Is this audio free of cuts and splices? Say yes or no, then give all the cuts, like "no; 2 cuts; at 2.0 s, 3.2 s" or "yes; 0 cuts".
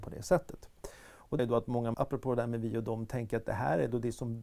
no; 2 cuts; at 1.4 s, 1.9 s